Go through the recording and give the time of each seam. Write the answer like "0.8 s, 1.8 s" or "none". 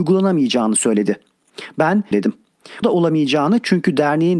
2.1 s, 2.8 s